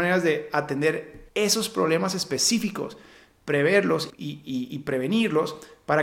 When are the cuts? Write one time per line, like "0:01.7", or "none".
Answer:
0:01.3
0:04.1